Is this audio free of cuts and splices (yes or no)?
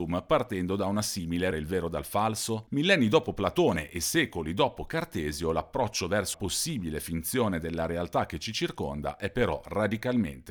no